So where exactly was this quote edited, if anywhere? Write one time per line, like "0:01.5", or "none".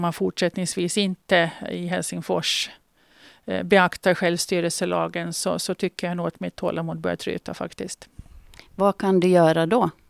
none